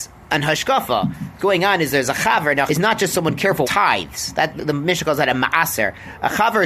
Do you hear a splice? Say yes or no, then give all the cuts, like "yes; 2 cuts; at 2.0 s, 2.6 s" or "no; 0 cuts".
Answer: yes; 4 cuts; at 1.4 s, 2.7 s, 3.6 s, 4.6 s